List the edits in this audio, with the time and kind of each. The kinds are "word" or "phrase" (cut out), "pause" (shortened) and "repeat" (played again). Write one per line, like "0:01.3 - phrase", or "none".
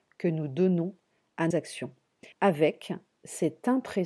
0:01.5 - word
0:02.3 - pause